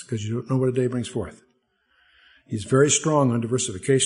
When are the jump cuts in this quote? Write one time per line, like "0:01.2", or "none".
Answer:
none